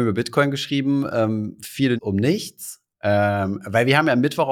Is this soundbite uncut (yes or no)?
no